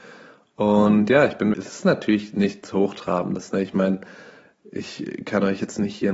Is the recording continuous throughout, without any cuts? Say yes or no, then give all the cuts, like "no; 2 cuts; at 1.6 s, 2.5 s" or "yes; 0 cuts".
no; 1 cut; at 1.5 s